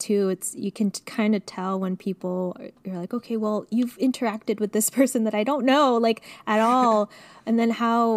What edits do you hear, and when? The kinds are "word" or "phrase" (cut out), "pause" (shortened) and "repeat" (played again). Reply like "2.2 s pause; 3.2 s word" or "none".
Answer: none